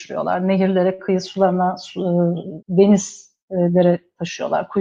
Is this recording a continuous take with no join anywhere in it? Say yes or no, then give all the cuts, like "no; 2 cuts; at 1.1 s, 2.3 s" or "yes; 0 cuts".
no; 1 cut; at 2.6 s